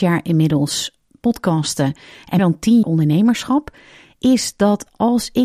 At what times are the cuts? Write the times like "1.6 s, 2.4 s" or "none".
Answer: 2.4 s, 2.8 s

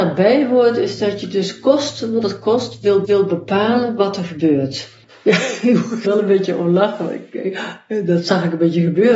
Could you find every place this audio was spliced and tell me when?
3.0 s, 5.0 s, 6.0 s

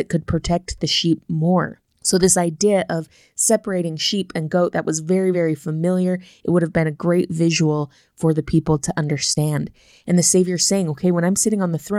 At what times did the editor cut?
none

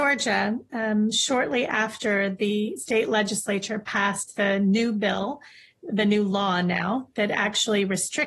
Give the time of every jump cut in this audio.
none

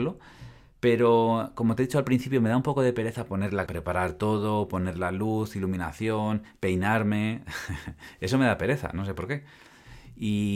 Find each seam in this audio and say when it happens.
3.7 s

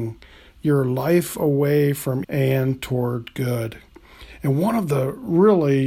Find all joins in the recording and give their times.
2.2 s

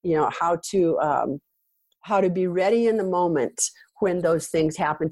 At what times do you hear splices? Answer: none

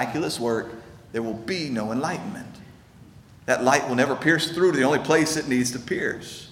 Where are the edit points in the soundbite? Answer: none

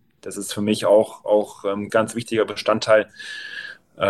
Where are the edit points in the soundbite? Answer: 1.9 s

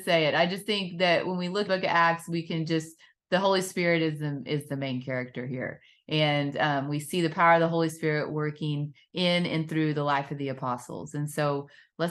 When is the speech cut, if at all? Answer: 1.7 s

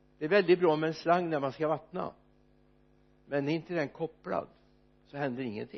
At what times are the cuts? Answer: none

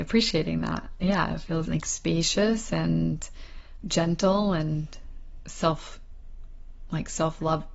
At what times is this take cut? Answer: 1.7 s, 3.8 s

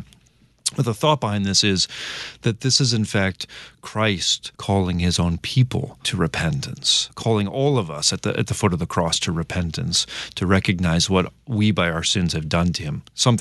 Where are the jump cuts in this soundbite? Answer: 4.5 s

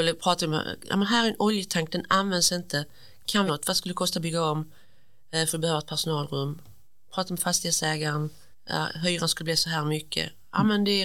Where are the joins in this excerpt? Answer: 3.5 s, 8.5 s

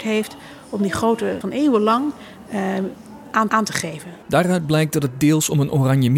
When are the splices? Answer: 1.4 s, 3.5 s, 4.2 s

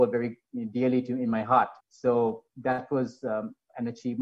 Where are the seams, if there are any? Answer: 1.8 s

